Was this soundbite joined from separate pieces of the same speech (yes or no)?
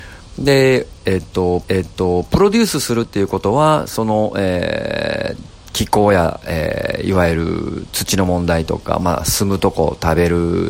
yes